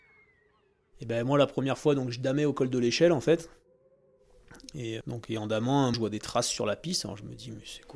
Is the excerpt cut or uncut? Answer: cut